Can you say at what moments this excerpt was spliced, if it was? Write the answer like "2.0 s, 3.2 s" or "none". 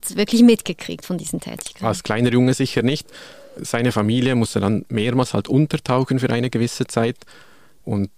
none